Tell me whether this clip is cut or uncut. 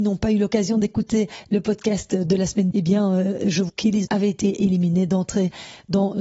cut